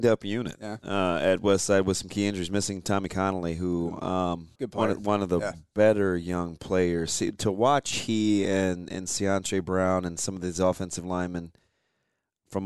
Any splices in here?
yes; 1 cut; at 4.5 s

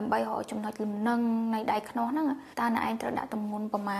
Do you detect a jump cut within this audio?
yes; 1 cut; at 2.5 s

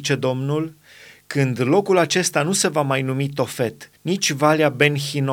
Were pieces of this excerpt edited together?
yes; 1 cut; at 4.0 s

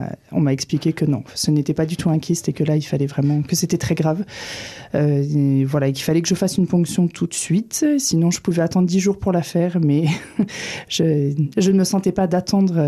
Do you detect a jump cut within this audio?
no; 0 cuts

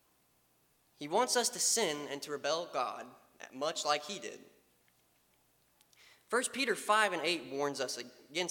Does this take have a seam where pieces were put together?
no; 0 cuts

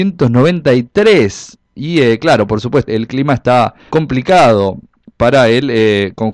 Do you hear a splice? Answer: yes; 2 cuts; at 2.9 s, 3.9 s

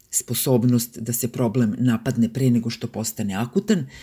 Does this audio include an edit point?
no; 0 cuts

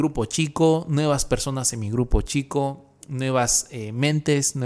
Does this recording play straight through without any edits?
yes; 0 cuts

